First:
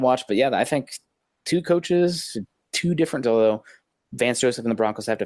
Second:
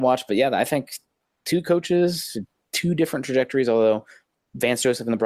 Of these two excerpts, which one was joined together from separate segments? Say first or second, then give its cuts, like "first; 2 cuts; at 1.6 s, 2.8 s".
first; 1 cut; at 3.2 s